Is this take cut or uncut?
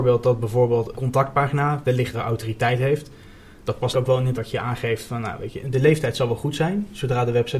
cut